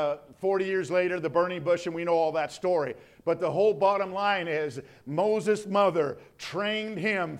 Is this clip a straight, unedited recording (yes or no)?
yes